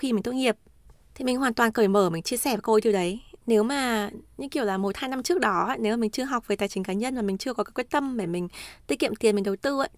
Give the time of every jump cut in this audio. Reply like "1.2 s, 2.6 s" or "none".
none